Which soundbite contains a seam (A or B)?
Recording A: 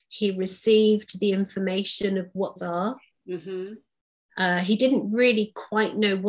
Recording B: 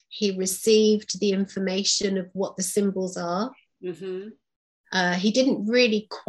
A